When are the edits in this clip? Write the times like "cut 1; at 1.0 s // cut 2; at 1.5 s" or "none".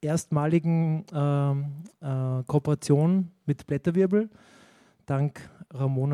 none